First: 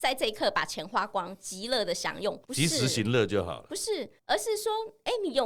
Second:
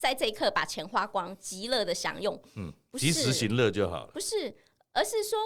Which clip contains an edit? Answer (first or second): first